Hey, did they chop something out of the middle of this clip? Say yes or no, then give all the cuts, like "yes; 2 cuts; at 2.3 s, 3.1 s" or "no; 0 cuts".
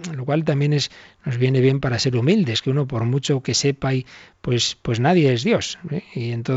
no; 0 cuts